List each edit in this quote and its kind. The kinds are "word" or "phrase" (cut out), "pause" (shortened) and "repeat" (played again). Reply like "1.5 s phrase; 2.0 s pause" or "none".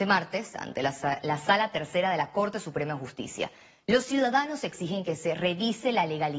none